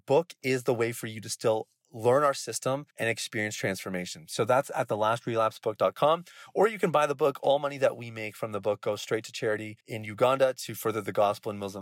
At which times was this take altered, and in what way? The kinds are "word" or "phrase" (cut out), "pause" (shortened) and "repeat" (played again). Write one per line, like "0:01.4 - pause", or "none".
0:02.9 - pause
0:09.8 - pause